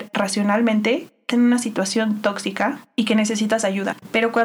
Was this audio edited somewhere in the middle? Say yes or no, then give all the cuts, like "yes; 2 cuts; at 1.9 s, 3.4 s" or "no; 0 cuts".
yes; 1 cut; at 1.3 s